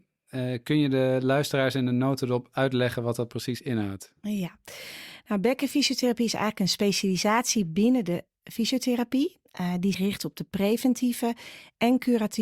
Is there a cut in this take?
yes; 1 cut; at 9.9 s

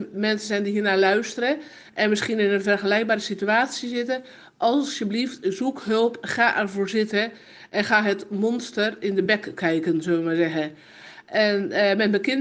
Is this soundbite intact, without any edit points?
yes; 0 cuts

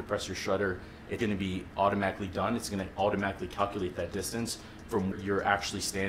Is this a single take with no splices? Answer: no; 2 cuts; at 1.2 s, 5.1 s

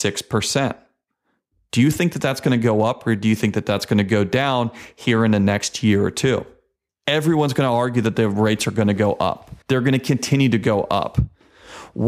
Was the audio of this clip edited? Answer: yes; 1 cut; at 9.6 s

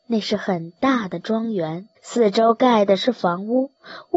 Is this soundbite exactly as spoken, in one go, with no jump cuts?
no; 1 cut; at 2.0 s

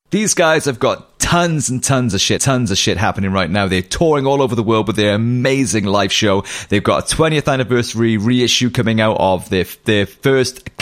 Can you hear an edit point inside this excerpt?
yes; 1 cut; at 2.4 s

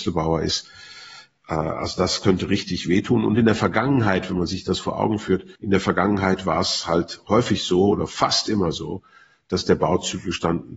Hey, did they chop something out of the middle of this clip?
yes; 1 cut; at 5.6 s

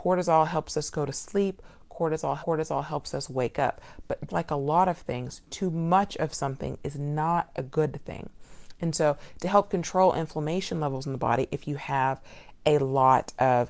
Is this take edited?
yes; 2 cuts; at 2.4 s, 4.3 s

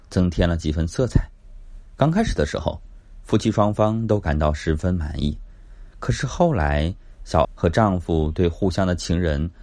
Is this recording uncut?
no; 1 cut; at 7.4 s

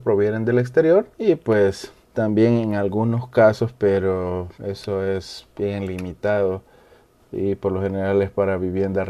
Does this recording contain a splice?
yes; 3 cuts; at 1.1 s, 2.0 s, 4.5 s

